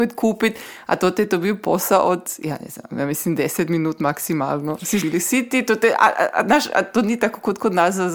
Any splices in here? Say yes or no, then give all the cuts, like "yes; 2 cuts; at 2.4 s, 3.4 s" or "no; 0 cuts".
yes; 1 cut; at 5.0 s